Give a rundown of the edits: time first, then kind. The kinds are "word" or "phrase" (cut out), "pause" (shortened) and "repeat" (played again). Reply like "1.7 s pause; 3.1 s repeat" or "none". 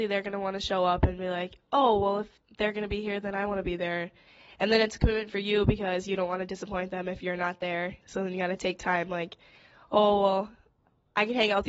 none